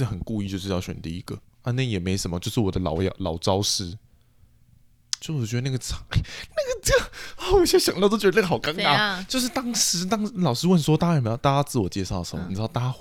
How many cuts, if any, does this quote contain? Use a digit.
1